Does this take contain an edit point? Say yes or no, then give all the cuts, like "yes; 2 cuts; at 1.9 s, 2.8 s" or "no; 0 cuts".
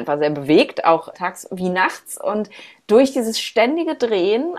yes; 1 cut; at 1.1 s